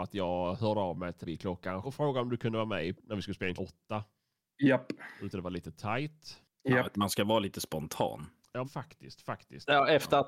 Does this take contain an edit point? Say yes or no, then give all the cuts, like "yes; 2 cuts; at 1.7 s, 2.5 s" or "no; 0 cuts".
yes; 7 cuts; at 1.2 s, 1.8 s, 2.9 s, 3.6 s, 5.3 s, 6.9 s, 8.6 s